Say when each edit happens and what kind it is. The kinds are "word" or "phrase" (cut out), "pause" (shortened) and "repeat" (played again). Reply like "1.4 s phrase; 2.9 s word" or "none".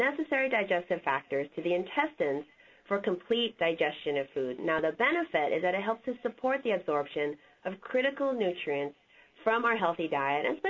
none